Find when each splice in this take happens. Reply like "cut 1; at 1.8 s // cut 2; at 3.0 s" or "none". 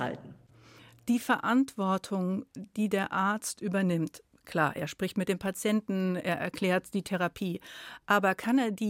none